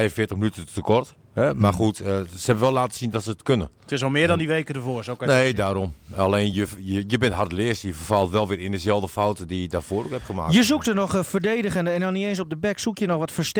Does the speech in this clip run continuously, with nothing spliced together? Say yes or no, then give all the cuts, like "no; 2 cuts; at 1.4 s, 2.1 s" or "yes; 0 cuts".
yes; 0 cuts